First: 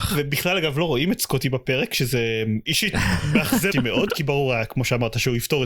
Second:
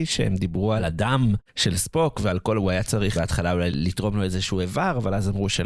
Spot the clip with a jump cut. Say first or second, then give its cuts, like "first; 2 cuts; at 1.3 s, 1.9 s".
first; 1 cut; at 3.7 s